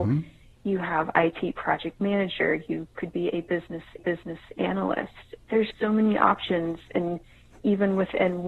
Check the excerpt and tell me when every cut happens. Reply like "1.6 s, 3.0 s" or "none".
4.0 s, 5.7 s

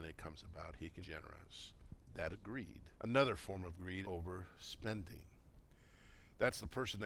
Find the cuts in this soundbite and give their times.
1.0 s, 2.3 s, 2.9 s, 4.0 s

